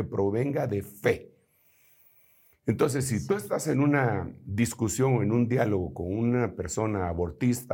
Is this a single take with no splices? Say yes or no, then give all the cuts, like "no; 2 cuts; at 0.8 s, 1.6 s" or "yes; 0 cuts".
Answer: yes; 0 cuts